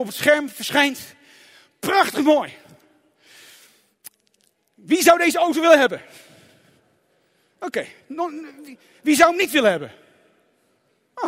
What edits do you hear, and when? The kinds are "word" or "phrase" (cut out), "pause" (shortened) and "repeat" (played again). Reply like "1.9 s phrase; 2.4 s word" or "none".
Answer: none